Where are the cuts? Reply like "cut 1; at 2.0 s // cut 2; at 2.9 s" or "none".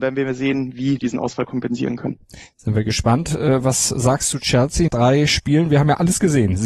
cut 1; at 1.0 s // cut 2; at 4.3 s // cut 3; at 4.9 s